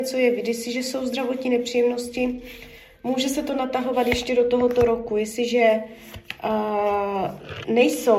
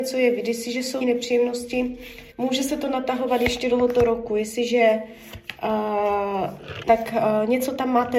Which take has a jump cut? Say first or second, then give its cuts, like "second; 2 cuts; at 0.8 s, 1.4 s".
second; 4 cuts; at 1.0 s, 2.3 s, 3.7 s, 6.9 s